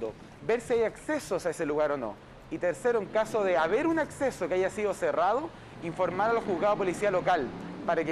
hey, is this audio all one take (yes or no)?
yes